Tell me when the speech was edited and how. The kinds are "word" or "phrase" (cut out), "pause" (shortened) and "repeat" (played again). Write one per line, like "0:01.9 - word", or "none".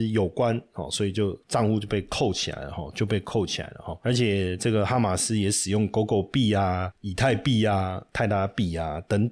0:01.4 - pause